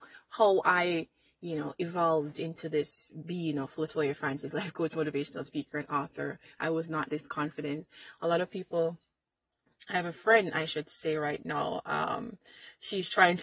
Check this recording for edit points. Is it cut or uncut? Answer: uncut